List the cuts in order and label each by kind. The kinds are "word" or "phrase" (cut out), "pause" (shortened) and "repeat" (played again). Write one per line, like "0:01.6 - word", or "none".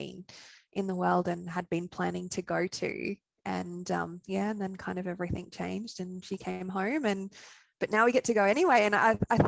none

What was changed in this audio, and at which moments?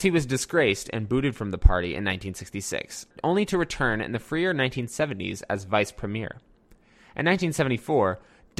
none

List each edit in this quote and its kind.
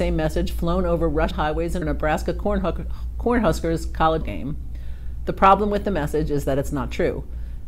0:01.3 - phrase
0:01.8 - phrase
0:04.2 - word

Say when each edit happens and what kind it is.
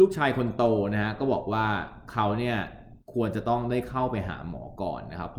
0:03.0 - pause

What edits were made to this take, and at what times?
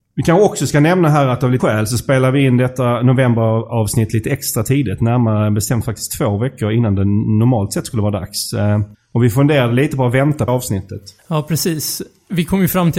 0:01.6 - word
0:08.9 - pause
0:10.5 - word
0:11.2 - pause

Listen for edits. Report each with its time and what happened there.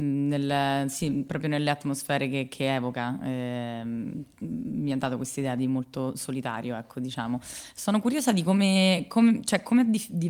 none

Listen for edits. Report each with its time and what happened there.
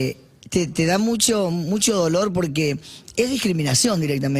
none

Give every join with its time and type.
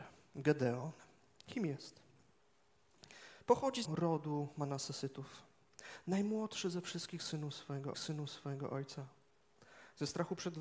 0:03.4 - pause
0:03.9 - word
0:07.9 - repeat

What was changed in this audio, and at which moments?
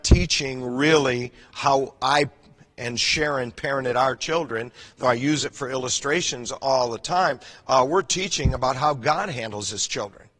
none

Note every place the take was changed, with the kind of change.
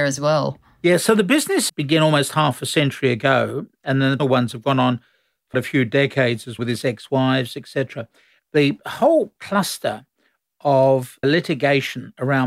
0:01.7 - word
0:04.2 - word
0:05.5 - word
0:06.6 - word
0:11.2 - word

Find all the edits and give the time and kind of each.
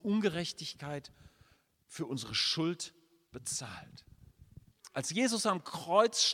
none

